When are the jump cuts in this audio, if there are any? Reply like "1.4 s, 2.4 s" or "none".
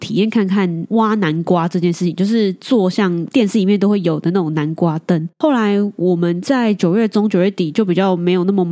5.3 s